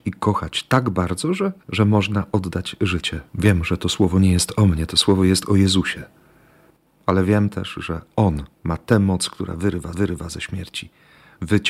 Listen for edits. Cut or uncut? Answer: cut